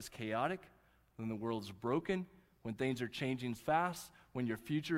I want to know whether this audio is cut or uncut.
cut